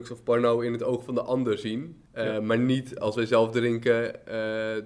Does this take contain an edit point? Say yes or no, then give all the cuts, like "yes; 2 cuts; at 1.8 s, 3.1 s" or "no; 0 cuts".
yes; 1 cut; at 2.1 s